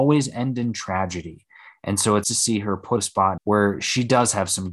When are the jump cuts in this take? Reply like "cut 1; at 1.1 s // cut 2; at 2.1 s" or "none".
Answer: cut 1; at 2.2 s // cut 2; at 3.0 s // cut 3; at 3.4 s